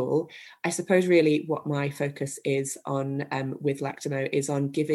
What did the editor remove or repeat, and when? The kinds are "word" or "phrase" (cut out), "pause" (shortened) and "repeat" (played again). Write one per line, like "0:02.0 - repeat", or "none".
none